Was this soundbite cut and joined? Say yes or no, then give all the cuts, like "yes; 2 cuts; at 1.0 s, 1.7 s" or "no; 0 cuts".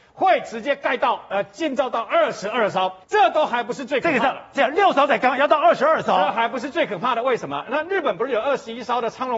yes; 1 cut; at 3.0 s